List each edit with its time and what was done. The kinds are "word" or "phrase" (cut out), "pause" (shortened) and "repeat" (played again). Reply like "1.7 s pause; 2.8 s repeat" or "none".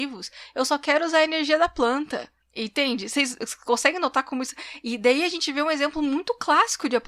2.4 s pause

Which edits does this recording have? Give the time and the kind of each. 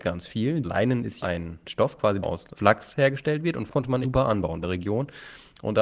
1.2 s word; 2.2 s word; 3.7 s word; 4.0 s word; 4.6 s phrase

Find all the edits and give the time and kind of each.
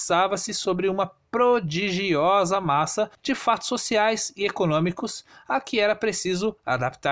none

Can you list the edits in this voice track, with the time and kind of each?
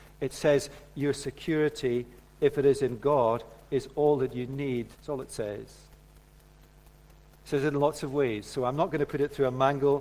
4.9 s pause

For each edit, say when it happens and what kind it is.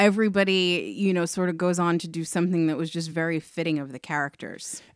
none

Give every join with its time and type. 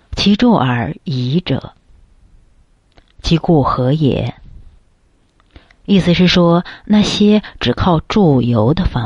none

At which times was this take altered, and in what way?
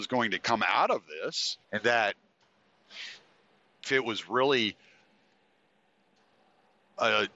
1.6 s pause; 3.8 s word

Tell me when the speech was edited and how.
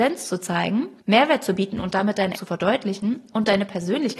2.3 s word

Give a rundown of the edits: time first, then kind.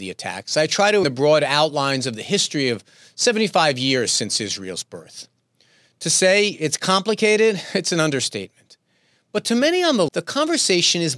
1.0 s word; 10.1 s word

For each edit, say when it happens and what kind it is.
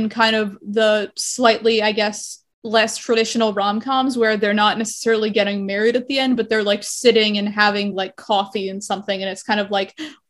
none

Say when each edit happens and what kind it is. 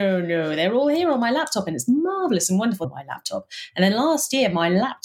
2.8 s phrase

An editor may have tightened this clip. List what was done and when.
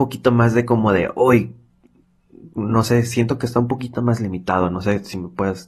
none

